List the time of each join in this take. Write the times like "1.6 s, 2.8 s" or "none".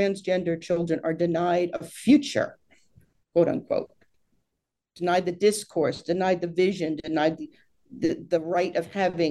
none